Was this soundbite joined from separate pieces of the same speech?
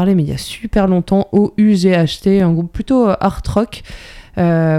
no; 0 cuts

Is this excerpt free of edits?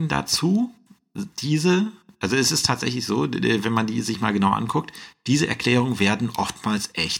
yes; 0 cuts

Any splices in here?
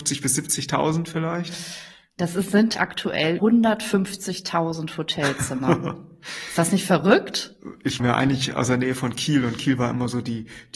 yes; 3 cuts; at 2.7 s, 3.4 s, 8.0 s

